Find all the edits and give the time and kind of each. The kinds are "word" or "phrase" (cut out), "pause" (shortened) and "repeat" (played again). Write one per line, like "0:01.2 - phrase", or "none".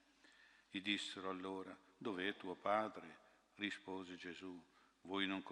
none